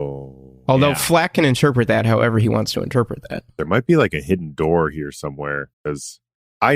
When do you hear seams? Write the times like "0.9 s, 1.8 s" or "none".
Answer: 3.5 s, 5.7 s

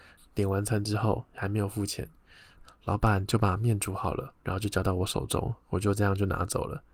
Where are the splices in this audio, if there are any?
4.4 s

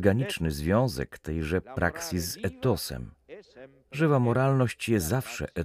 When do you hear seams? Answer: none

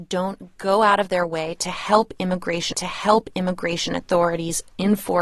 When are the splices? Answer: 2.7 s

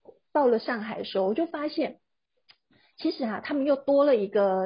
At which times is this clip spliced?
none

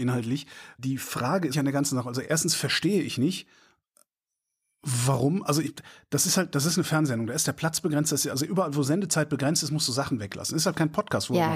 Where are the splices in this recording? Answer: 1.5 s, 2.2 s

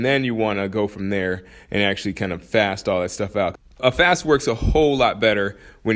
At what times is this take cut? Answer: none

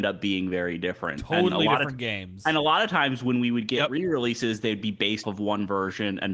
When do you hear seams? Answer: 5.2 s

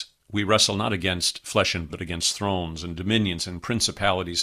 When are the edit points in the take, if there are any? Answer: 1.9 s

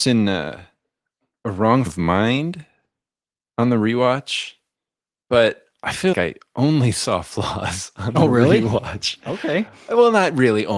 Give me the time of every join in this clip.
1.9 s, 6.1 s

